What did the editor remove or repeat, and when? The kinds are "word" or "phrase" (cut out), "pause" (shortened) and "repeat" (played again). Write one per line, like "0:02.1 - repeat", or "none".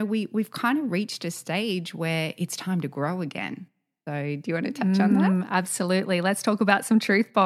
none

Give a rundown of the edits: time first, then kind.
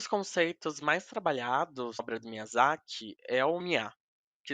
0:02.0 - word
0:03.6 - word

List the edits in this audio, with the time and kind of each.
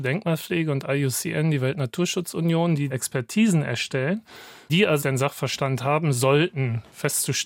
0:02.9 - word
0:04.7 - word
0:05.0 - word

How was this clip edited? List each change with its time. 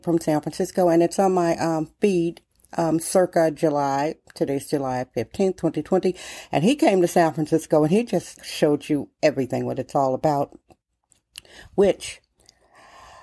0:08.4 - word

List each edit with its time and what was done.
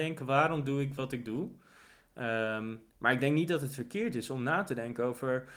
0:02.9 - pause

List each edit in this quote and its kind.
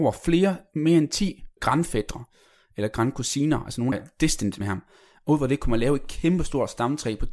0:01.6 - word
0:03.9 - phrase
0:04.6 - word

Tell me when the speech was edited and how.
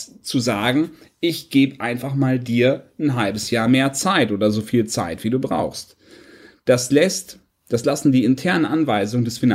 none

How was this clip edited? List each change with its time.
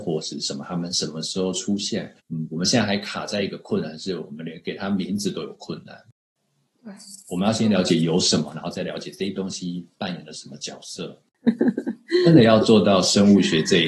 0:02.2 - pause

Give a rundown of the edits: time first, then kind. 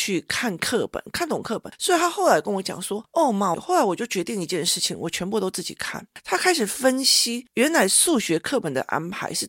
0:03.5 - phrase

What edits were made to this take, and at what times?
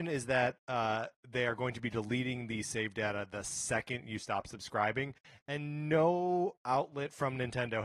none

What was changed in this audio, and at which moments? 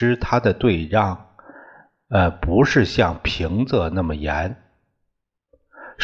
none

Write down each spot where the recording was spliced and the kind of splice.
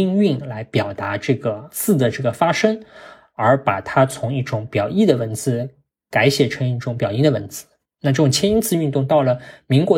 none

